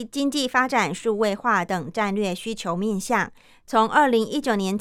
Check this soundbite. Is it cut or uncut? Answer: uncut